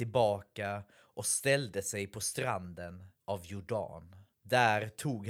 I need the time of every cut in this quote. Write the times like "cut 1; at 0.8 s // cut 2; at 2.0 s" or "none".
cut 1; at 3.2 s // cut 2; at 4.3 s